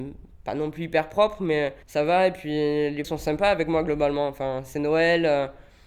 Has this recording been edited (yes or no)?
yes